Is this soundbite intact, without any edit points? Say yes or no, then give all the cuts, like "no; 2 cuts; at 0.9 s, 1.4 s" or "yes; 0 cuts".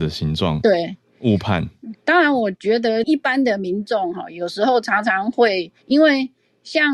no; 1 cut; at 5.8 s